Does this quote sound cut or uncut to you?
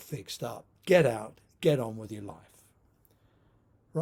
uncut